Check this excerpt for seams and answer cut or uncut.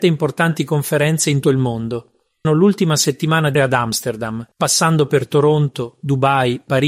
cut